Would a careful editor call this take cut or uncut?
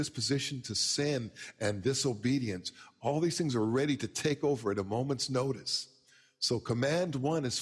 uncut